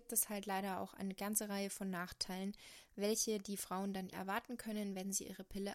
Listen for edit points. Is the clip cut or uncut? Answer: cut